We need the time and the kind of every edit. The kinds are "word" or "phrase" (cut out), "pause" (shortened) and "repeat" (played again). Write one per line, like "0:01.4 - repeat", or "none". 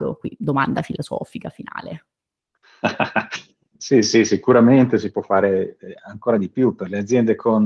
none